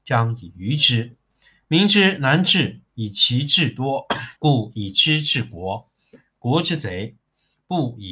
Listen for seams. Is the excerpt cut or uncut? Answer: cut